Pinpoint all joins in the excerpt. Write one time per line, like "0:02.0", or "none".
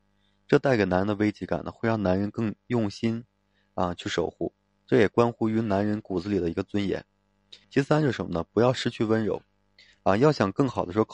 0:07.6